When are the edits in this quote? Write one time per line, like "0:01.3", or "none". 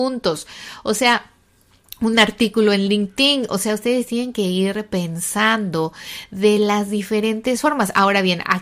none